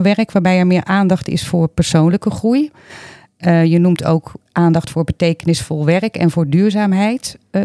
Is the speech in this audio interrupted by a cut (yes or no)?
no